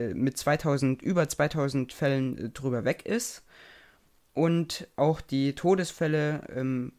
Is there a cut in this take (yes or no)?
no